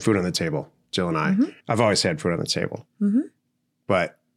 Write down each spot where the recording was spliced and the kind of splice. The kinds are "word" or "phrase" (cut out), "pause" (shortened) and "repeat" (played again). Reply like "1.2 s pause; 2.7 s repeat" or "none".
1.6 s pause; 2.9 s pause